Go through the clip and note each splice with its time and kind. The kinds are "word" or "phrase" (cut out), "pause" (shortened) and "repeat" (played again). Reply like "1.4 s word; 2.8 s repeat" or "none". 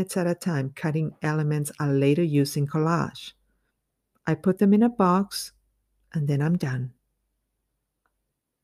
none